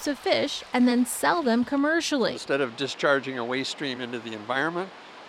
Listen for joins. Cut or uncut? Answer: uncut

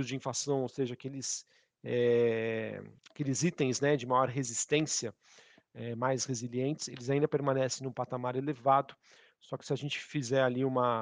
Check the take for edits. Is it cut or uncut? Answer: cut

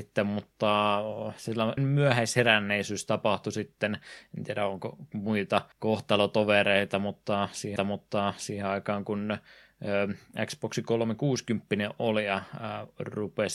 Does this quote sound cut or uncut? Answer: cut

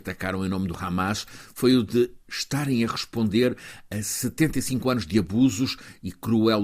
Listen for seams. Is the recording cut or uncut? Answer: uncut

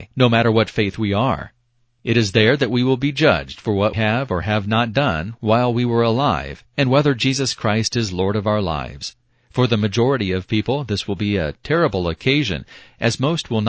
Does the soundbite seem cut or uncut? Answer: cut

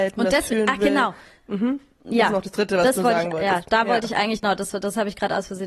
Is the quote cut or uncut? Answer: uncut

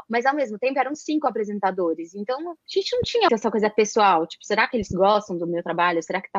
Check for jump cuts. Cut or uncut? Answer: cut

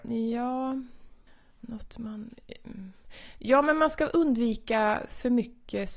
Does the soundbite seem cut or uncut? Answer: uncut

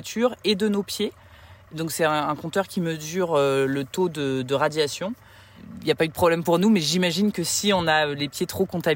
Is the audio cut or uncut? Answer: uncut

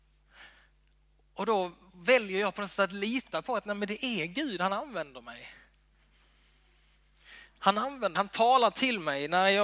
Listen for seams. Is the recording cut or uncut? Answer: cut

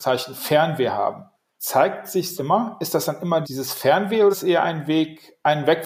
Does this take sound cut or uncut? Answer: cut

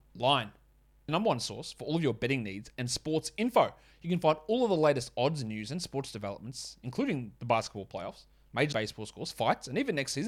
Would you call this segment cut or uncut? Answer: cut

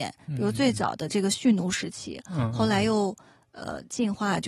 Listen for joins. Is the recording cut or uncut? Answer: uncut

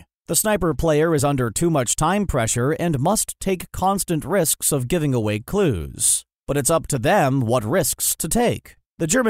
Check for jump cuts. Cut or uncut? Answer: uncut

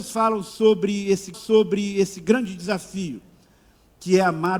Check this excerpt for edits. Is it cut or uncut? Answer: cut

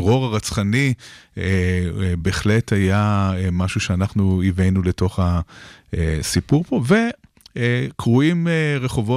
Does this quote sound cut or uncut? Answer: uncut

